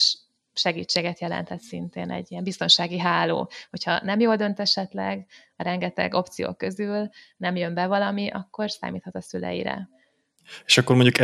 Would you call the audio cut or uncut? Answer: uncut